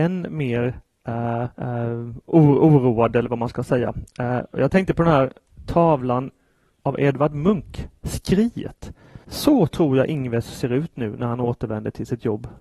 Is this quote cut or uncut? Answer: cut